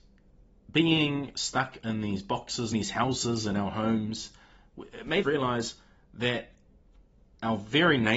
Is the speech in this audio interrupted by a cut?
yes; 2 cuts; at 2.7 s, 5.2 s

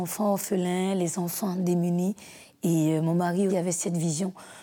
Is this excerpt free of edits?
no; 1 cut; at 3.5 s

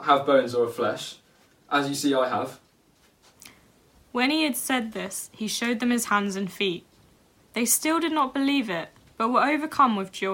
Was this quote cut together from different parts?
no; 0 cuts

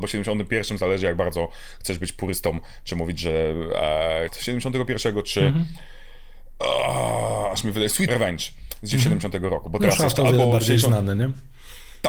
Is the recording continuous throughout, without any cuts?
no; 2 cuts; at 4.3 s, 8.1 s

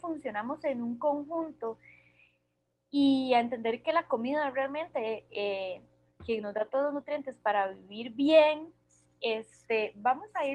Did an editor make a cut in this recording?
no; 0 cuts

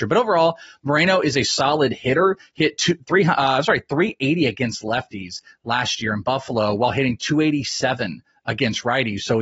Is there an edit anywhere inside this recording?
no; 0 cuts

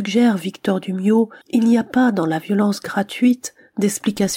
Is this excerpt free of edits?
no; 1 cut; at 1.4 s

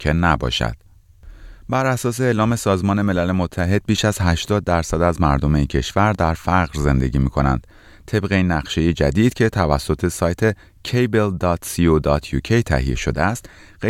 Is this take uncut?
yes; 0 cuts

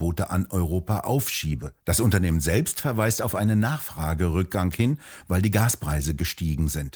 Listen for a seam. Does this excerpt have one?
yes; 1 cut; at 1.8 s

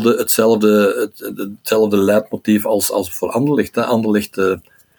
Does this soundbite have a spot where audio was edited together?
no; 0 cuts

